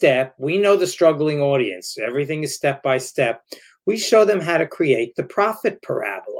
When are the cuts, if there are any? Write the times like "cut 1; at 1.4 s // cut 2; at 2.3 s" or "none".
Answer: none